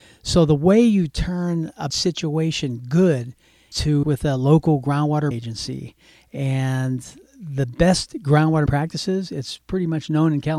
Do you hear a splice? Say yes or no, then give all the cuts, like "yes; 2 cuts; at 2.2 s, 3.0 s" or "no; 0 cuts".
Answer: yes; 5 cuts; at 1.9 s, 3.7 s, 4.0 s, 5.3 s, 8.7 s